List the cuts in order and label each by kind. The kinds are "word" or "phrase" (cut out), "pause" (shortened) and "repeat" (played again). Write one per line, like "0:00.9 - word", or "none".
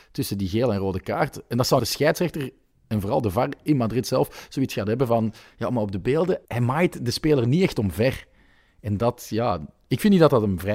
0:01.8 - phrase
0:06.4 - word
0:09.0 - word